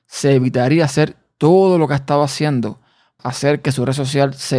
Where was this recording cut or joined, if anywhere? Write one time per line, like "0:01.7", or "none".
0:03.2